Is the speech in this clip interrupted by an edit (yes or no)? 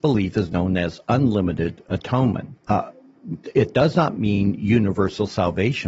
yes